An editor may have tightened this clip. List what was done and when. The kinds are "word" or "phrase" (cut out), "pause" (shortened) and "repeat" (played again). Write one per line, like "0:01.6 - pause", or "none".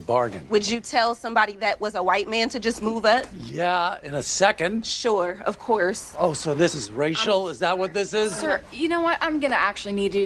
none